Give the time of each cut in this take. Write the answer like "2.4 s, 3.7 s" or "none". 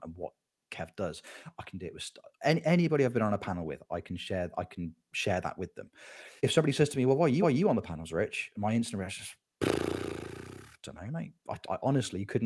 6.4 s, 7.4 s, 11.4 s